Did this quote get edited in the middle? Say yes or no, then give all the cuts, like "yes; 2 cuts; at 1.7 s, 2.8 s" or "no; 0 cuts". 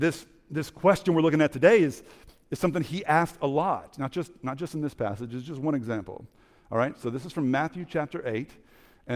no; 0 cuts